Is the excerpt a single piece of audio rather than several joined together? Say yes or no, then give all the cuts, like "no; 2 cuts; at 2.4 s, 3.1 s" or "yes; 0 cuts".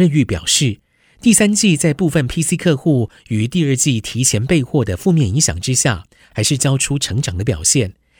yes; 0 cuts